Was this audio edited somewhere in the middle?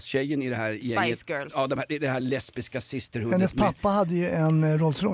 no; 0 cuts

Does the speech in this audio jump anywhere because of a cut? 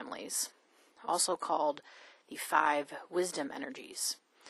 no; 0 cuts

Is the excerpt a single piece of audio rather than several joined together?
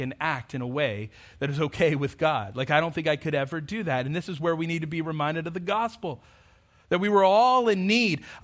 yes; 0 cuts

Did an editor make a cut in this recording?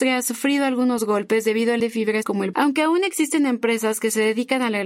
yes; 3 cuts; at 1.8 s, 2.2 s, 2.5 s

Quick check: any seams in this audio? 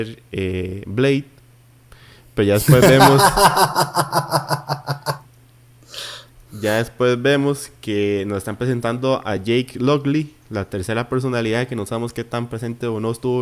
no; 0 cuts

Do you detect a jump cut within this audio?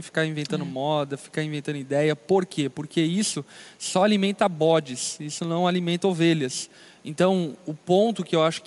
no; 0 cuts

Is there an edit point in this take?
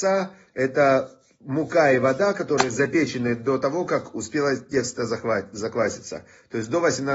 no; 0 cuts

